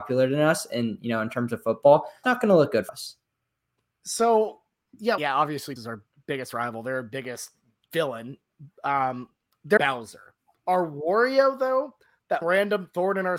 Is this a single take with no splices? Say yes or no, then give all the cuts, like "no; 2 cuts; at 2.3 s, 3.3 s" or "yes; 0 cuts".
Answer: no; 6 cuts; at 2.2 s, 2.9 s, 5.2 s, 5.8 s, 9.8 s, 12.4 s